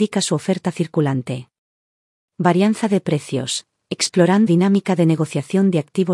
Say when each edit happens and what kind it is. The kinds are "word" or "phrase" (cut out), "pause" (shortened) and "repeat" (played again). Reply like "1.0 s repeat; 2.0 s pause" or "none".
4.5 s word